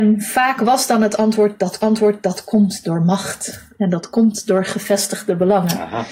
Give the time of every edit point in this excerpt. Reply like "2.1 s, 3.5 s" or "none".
1.8 s